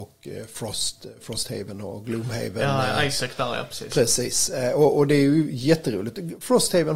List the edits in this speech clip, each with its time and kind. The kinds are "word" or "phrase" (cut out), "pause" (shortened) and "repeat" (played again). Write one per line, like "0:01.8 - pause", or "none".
none